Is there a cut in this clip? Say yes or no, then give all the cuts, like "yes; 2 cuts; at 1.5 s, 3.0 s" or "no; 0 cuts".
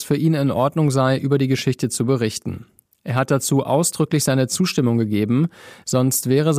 no; 0 cuts